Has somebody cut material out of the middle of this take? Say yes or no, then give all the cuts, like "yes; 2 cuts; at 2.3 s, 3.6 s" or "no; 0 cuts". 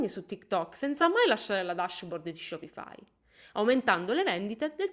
no; 0 cuts